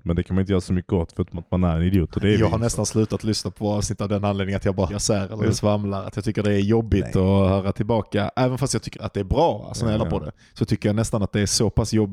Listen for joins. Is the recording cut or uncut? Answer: cut